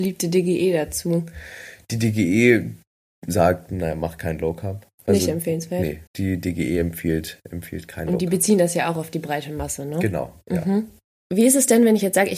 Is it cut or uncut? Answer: cut